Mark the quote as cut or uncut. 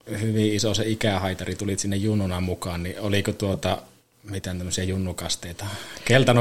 uncut